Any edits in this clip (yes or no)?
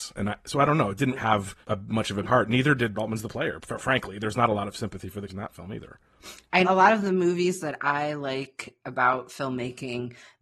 yes